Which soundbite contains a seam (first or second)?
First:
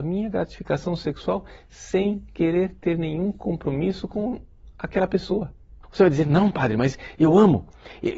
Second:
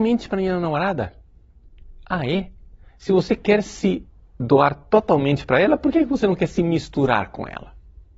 first